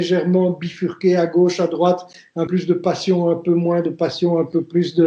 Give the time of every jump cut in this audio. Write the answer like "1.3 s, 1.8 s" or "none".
2.5 s